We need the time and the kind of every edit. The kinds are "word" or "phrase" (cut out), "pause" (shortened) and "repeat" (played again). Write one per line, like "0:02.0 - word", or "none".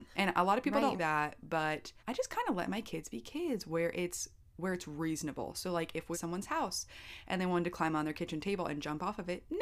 0:01.0 - word
0:02.0 - pause
0:06.1 - phrase